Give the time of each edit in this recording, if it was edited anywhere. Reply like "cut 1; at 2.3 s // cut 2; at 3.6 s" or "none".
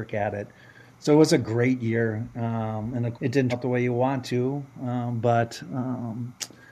cut 1; at 3.1 s // cut 2; at 3.5 s